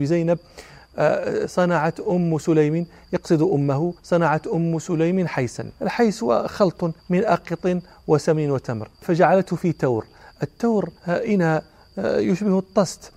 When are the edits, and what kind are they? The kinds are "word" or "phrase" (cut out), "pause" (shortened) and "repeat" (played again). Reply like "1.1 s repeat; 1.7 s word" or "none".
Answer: 4.0 s pause; 5.8 s pause; 7.0 s pause; 8.9 s pause; 11.0 s pause